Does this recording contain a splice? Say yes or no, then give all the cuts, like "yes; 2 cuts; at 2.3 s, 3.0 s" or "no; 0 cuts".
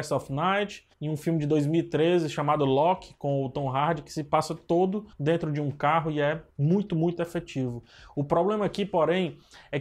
yes; 3 cuts; at 0.9 s, 5.1 s, 6.5 s